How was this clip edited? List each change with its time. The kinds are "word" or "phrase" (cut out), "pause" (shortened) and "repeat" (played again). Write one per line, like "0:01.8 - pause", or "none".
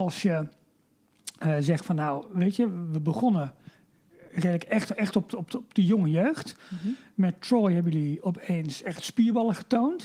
none